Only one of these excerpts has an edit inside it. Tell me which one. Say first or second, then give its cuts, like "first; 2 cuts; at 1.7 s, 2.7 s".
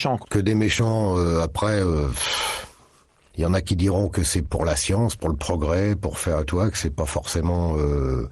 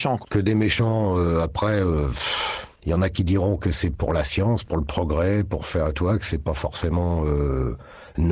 second; 1 cut; at 2.7 s